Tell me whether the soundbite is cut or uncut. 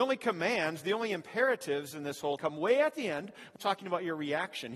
cut